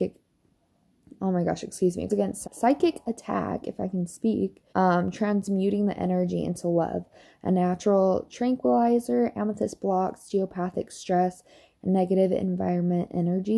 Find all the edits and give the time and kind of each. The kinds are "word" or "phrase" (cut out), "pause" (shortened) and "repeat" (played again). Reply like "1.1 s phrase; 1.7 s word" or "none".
2.1 s word; 2.4 s word; 4.7 s pause